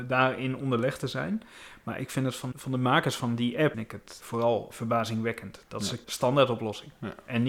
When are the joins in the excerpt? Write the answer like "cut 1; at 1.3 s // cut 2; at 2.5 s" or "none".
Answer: cut 1; at 2.5 s // cut 2; at 3.7 s // cut 3; at 4.2 s // cut 4; at 4.7 s // cut 5; at 6.0 s